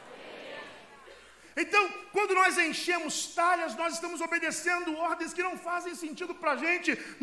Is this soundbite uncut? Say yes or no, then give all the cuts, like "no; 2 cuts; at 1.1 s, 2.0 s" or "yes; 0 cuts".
yes; 0 cuts